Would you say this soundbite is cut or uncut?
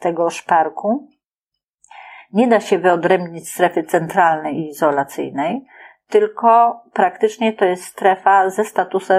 uncut